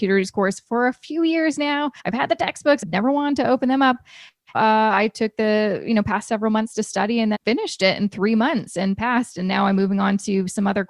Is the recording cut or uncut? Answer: cut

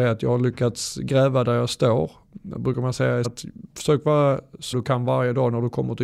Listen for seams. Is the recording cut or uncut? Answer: cut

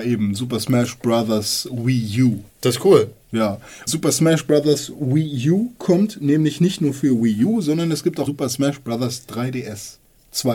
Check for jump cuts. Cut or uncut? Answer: cut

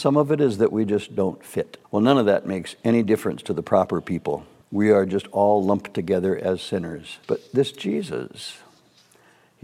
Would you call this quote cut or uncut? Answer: cut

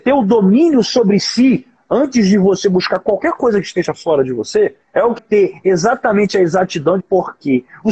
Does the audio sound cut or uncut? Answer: cut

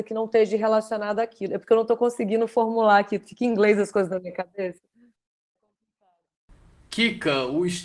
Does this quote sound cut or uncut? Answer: uncut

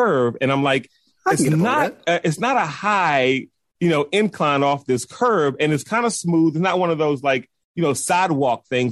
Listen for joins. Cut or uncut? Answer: uncut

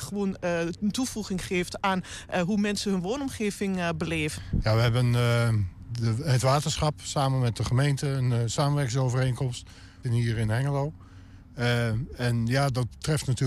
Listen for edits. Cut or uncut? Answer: cut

